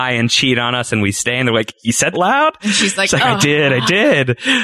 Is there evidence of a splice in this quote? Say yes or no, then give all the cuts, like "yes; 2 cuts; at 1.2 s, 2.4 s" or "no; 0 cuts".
yes; 1 cut; at 2.1 s